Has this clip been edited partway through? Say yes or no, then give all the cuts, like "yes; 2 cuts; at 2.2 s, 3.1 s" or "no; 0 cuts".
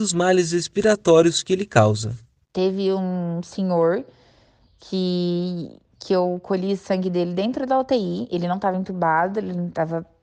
no; 0 cuts